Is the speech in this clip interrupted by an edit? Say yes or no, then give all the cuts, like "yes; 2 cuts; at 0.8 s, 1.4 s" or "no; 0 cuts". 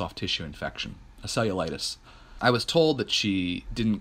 no; 0 cuts